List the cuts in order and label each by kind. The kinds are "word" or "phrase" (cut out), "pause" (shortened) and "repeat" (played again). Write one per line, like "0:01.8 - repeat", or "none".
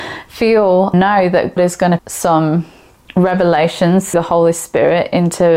0:00.9 - word
0:01.6 - word
0:02.0 - word
0:04.1 - word